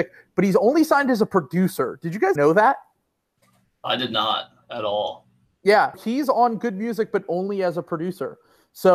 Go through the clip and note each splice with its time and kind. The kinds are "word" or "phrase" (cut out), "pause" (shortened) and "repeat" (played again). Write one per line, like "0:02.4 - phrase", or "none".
0:02.4 - word
0:05.9 - word

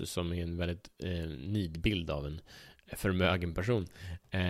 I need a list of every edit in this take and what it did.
none

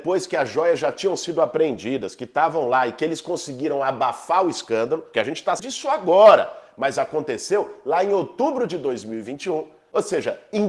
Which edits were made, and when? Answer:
0:05.6 - word

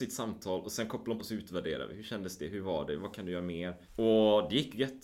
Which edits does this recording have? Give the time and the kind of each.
0:01.2 - phrase
0:03.8 - pause

